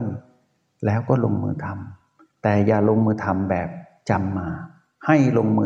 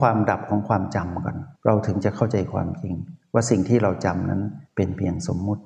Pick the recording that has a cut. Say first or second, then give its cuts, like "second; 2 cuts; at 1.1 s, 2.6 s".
second; 2 cuts; at 1.6 s, 4.7 s